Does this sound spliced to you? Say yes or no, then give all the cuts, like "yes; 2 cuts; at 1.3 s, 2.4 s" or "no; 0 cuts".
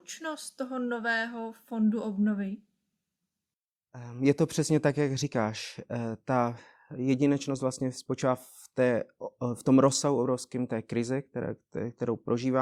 no; 0 cuts